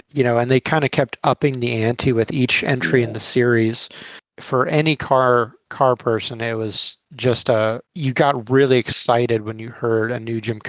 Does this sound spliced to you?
yes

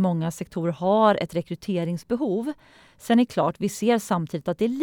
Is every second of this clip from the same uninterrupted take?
yes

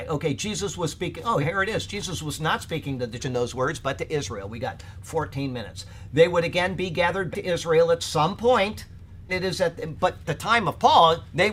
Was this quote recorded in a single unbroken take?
no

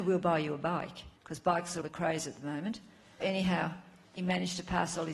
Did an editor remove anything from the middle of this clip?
yes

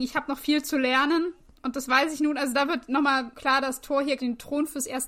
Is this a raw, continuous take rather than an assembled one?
no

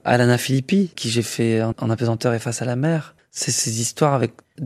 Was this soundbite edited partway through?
yes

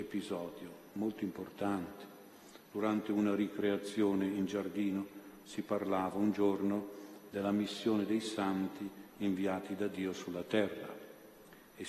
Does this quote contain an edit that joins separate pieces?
no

